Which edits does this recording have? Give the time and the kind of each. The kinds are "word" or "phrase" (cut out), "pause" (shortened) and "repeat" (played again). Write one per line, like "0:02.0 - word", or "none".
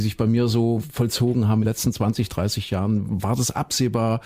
0:01.6 - word